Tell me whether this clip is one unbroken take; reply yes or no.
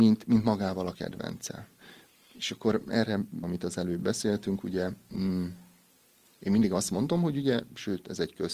no